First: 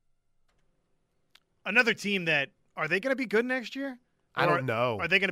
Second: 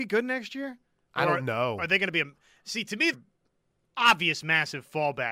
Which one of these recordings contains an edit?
second; 1 cut; at 3.1 s

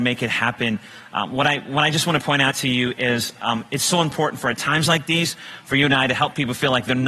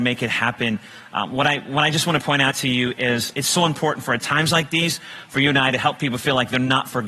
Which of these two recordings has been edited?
second; 1 cut; at 3.3 s

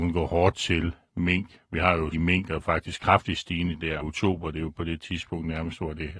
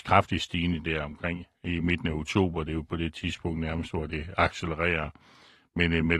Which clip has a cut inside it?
first; 2 cuts; at 2.1 s, 4.0 s

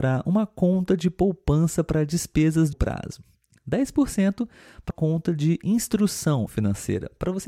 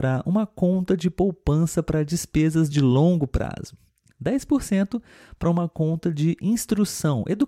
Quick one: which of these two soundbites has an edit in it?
first; 3 cuts; at 2.7 s, 4.9 s, 6.5 s

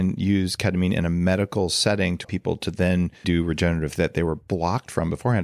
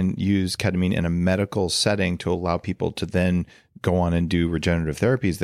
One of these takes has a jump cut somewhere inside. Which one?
first; 3 cuts; at 2.2 s, 3.2 s, 4.0 s

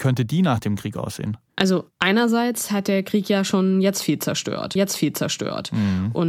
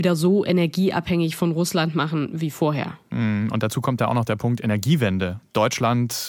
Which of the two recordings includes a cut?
first; 2 cuts; at 1.5 s, 4.8 s

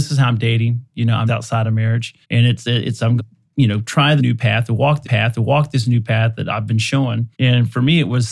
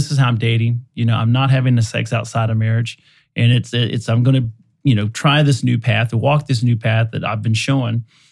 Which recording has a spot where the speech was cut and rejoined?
first; 6 cuts; at 1.3 s, 2.2 s, 3.2 s, 4.2 s, 5.0 s, 7.3 s

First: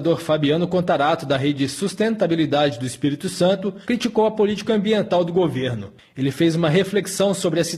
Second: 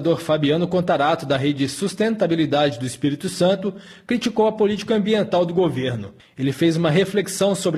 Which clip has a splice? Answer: first; 1 cut; at 3.8 s

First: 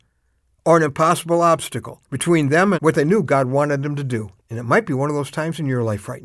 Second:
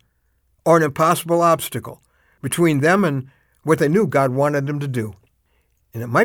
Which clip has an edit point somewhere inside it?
first; 3 cuts; at 2.0 s, 2.7 s, 4.4 s

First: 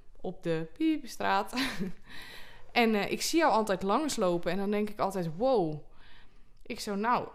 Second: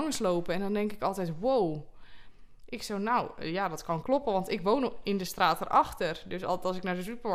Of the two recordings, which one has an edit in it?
second; 1 cut; at 4.0 s

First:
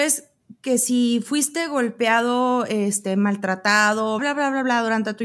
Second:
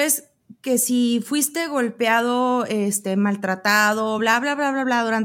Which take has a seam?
first; 1 cut; at 4.2 s

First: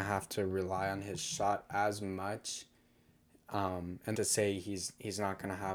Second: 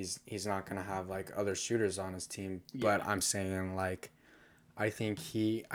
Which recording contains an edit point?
first; 1 cut; at 4.1 s

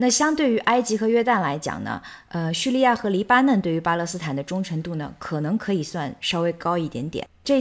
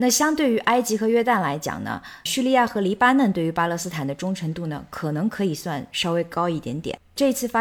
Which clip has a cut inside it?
second; 1 cut; at 2.3 s

